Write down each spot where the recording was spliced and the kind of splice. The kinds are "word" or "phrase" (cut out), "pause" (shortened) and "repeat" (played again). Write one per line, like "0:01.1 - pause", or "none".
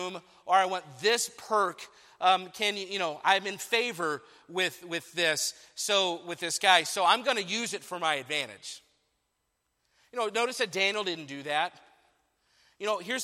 none